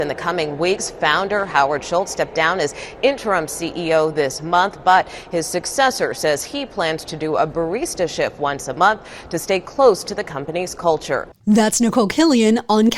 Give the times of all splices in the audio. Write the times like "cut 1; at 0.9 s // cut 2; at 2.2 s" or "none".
none